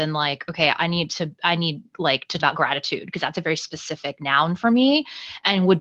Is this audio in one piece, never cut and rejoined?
no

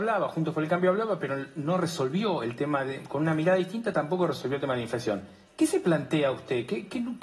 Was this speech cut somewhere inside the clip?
no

